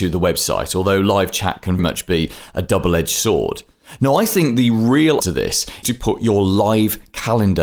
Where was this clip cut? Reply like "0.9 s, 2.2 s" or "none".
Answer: 1.8 s, 5.2 s, 5.8 s